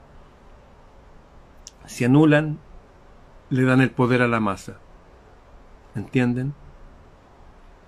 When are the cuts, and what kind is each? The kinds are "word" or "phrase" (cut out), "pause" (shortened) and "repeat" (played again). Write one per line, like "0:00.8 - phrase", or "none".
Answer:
none

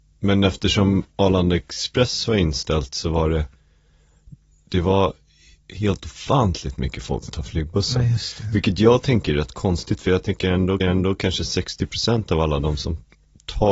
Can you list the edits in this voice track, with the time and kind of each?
0:07.3 - word
0:10.8 - repeat

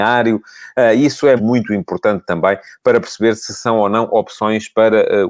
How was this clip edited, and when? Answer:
0:01.4 - word

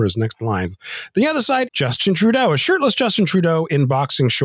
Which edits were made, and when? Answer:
0:01.7 - word

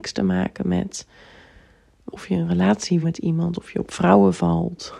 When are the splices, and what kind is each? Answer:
0:02.1 - word
0:03.0 - word

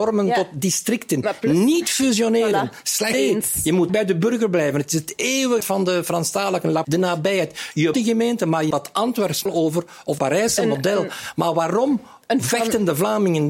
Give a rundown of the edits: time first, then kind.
0:03.1 - word
0:03.9 - word
0:05.6 - word
0:06.8 - word
0:07.9 - word
0:08.7 - word
0:09.5 - word
0:10.2 - word

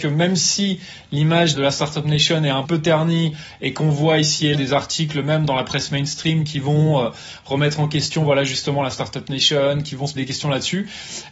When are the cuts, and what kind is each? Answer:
0:01.5 - word
0:02.6 - word
0:04.5 - word
0:10.2 - word

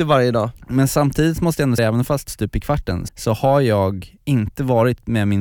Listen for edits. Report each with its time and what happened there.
0:01.8 - word
0:02.3 - phrase
0:03.1 - word
0:04.2 - pause

